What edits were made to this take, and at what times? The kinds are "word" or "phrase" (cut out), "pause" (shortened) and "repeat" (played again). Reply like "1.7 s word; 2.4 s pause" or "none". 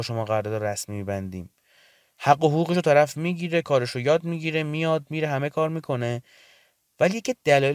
none